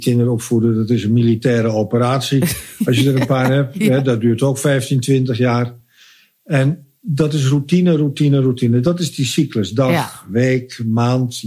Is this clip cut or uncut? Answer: uncut